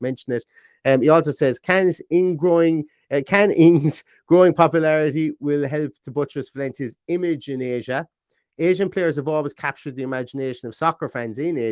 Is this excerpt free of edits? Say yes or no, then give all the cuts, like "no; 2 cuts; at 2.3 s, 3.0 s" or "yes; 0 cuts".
yes; 0 cuts